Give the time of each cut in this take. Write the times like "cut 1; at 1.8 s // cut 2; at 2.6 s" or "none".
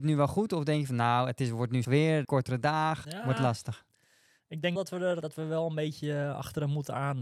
cut 1; at 1.8 s // cut 2; at 2.2 s // cut 3; at 3.0 s // cut 4; at 4.8 s // cut 5; at 5.2 s